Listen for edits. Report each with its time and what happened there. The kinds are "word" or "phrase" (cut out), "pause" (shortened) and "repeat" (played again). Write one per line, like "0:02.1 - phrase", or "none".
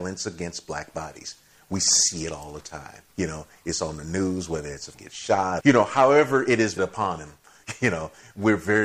0:03.1 - pause
0:04.9 - phrase
0:05.6 - word
0:06.8 - word